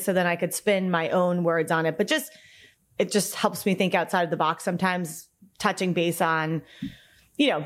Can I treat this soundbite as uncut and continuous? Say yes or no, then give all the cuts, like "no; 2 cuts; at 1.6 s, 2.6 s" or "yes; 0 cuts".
yes; 0 cuts